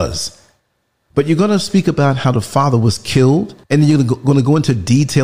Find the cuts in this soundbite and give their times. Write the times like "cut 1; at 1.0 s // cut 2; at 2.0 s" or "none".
cut 1; at 3.6 s